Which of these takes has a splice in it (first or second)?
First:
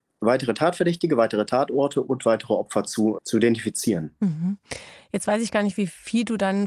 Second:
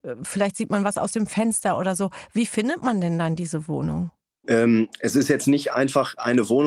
first